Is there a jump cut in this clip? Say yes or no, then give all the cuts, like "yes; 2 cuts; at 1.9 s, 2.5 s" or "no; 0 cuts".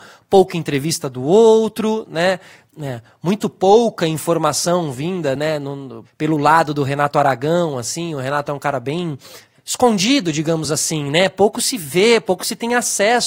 no; 0 cuts